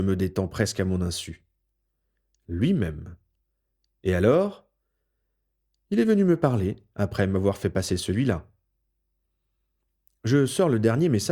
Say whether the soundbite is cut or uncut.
uncut